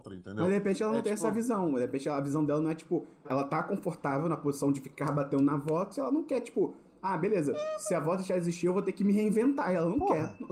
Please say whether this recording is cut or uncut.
cut